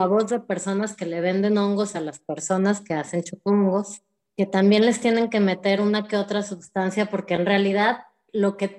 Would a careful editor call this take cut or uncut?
uncut